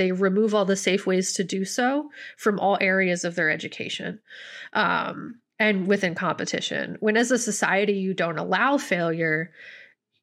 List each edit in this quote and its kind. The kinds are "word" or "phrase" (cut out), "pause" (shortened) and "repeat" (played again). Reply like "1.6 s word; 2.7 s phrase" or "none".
5.5 s pause